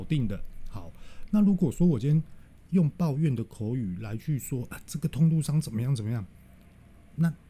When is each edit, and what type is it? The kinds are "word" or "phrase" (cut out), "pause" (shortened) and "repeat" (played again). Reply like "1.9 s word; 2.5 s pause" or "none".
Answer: none